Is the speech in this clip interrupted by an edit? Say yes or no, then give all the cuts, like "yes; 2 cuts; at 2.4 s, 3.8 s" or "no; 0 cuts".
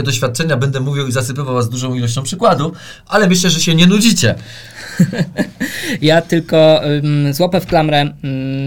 no; 0 cuts